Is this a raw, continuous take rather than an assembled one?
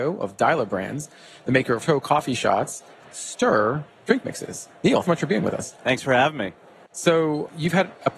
no; 3 cuts; at 1.8 s, 3.0 s, 5.0 s

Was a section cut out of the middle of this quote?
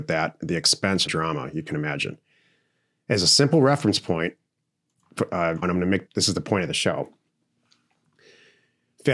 yes; 3 cuts; at 1.1 s, 5.6 s, 6.1 s

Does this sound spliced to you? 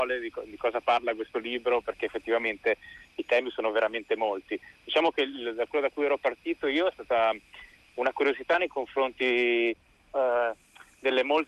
no; 0 cuts

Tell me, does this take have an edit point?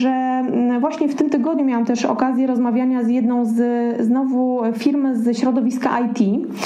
no; 0 cuts

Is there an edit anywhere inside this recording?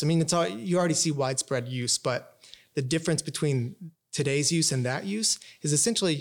no; 0 cuts

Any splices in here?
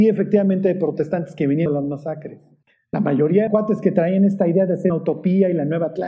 yes; 4 cuts; at 1.7 s, 2.6 s, 3.5 s, 4.9 s

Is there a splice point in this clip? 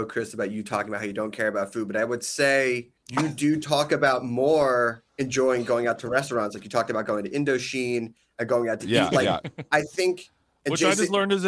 yes; 2 cuts; at 3.0 s, 5.1 s

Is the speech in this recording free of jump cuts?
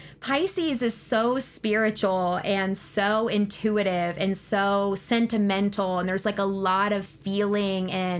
yes; 0 cuts

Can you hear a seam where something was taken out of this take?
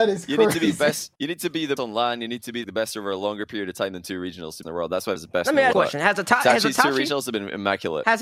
yes; 6 cuts; at 1.1 s, 1.8 s, 2.6 s, 4.6 s, 5.2 s, 5.7 s

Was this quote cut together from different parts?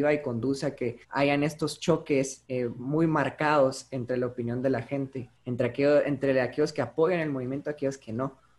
yes; 3 cuts; at 1.0 s, 2.4 s, 5.4 s

